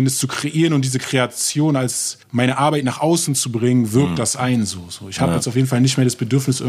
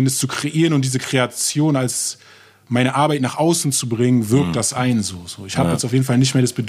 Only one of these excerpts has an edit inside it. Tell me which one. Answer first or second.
first